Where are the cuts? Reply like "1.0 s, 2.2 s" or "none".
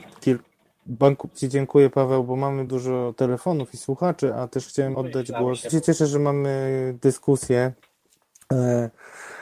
1.3 s, 2.7 s, 4.9 s, 5.7 s